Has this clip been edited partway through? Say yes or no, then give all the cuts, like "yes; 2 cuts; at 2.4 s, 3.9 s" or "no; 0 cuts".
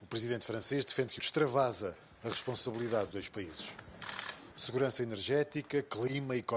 yes; 3 cuts; at 1.2 s, 3.1 s, 4.5 s